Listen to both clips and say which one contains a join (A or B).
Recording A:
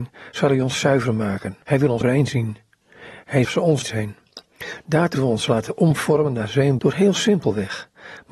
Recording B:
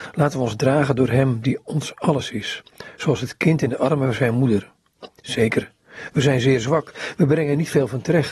A